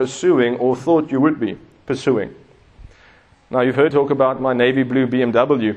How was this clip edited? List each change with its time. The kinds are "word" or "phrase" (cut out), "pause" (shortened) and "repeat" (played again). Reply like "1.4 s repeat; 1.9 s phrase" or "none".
3.9 s word